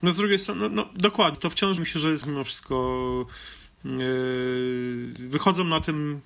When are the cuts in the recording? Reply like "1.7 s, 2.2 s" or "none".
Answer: 1.3 s, 1.8 s, 2.2 s